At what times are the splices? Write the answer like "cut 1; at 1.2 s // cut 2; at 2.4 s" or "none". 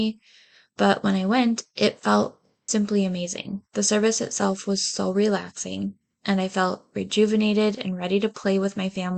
cut 1; at 2.7 s